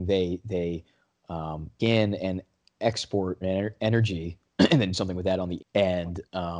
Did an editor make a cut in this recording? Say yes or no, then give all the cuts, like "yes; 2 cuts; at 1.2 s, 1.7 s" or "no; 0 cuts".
yes; 4 cuts; at 1.8 s, 3.4 s, 4.9 s, 5.6 s